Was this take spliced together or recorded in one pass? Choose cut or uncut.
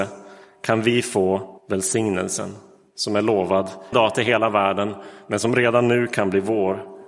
cut